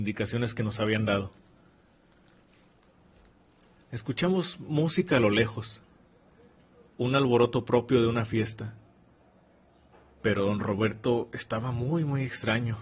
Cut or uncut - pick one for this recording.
uncut